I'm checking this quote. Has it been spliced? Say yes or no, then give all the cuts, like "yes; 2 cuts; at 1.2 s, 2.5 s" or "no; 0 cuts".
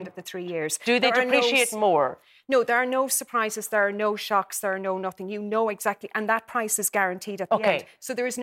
no; 0 cuts